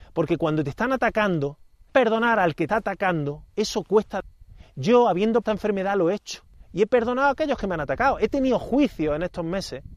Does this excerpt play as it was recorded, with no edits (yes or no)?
no